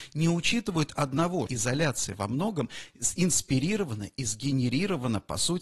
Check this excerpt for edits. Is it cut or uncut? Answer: cut